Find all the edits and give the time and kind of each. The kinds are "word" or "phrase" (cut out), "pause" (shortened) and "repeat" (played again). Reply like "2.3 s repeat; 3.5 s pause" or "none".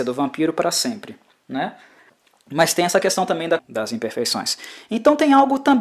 2.1 s pause; 3.6 s word